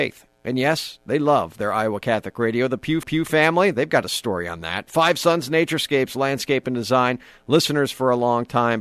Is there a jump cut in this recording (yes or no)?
yes